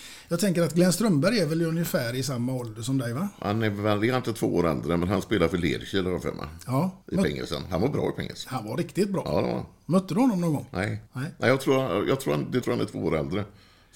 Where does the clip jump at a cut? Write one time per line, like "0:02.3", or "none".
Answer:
0:07.0
0:11.1
0:12.6